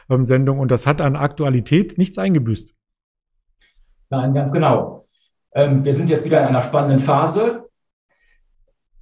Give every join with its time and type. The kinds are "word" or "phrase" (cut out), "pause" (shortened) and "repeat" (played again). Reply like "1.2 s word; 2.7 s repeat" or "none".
none